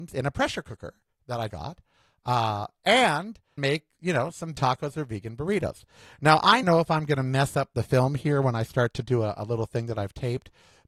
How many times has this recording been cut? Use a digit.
4